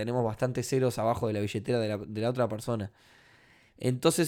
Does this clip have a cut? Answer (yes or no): no